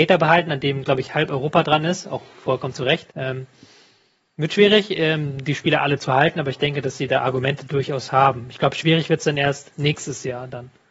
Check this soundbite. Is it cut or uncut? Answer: cut